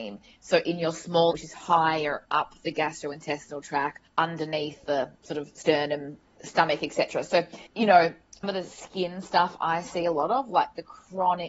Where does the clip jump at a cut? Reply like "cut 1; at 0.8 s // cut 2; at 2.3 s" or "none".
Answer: cut 1; at 1.3 s // cut 2; at 4.1 s // cut 3; at 6.4 s // cut 4; at 7.7 s // cut 5; at 8.4 s